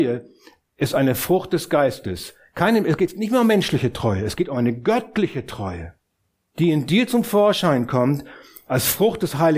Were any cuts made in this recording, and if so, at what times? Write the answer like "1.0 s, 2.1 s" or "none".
6.3 s